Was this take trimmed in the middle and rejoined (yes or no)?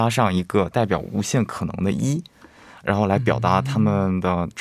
no